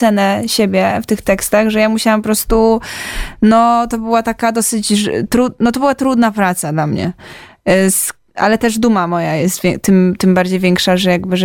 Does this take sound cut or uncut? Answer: uncut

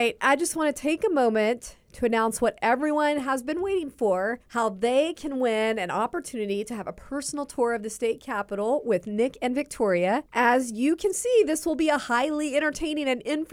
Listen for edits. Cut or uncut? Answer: cut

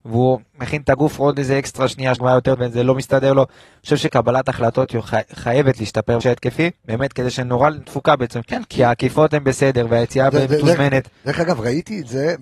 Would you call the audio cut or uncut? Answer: cut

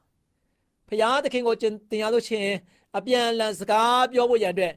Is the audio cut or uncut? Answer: uncut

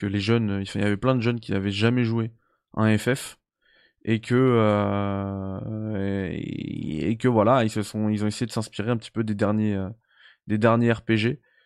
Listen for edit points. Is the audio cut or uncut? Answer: uncut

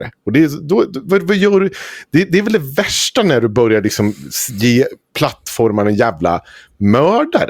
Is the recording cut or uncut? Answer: uncut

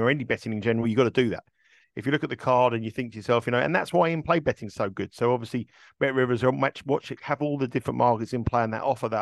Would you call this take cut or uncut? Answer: uncut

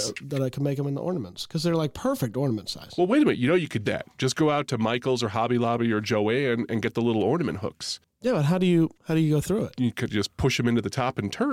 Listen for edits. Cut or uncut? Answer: cut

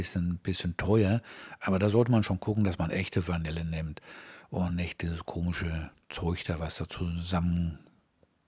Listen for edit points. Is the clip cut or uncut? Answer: uncut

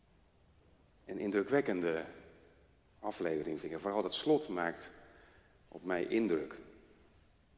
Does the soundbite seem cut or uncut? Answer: cut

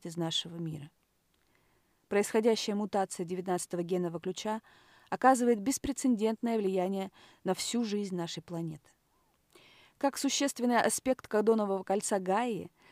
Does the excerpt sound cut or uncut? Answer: uncut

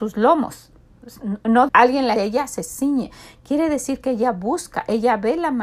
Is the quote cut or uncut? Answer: cut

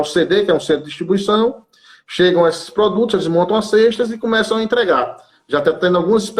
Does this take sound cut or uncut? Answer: uncut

